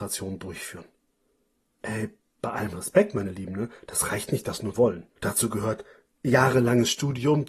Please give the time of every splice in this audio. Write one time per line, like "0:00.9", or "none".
0:04.7
0:05.2